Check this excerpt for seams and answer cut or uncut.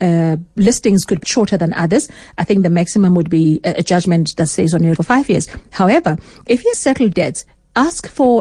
cut